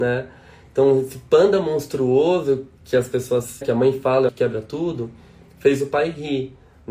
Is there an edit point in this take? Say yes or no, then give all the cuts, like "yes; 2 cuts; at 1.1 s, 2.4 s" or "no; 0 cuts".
yes; 3 cuts; at 2.8 s, 3.6 s, 4.3 s